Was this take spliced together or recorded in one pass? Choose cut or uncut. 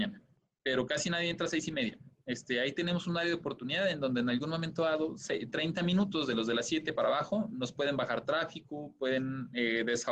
uncut